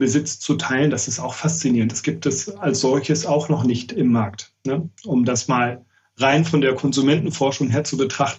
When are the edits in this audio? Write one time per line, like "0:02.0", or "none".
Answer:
none